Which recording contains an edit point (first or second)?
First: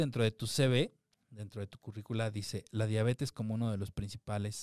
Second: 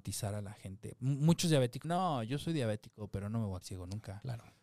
second